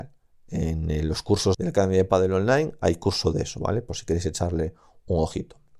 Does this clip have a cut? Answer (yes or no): yes